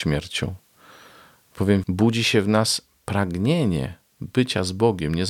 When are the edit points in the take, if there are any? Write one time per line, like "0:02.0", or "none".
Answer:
0:01.8